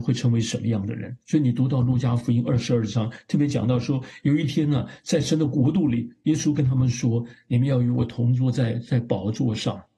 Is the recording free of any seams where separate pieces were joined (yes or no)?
no